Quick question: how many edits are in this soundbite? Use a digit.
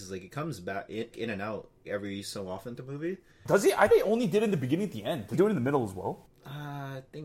5